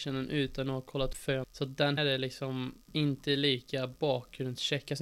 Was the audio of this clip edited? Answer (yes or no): yes